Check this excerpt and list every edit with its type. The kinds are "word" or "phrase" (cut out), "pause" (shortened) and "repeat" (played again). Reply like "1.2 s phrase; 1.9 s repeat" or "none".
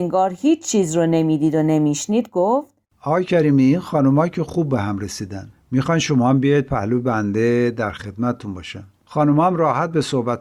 none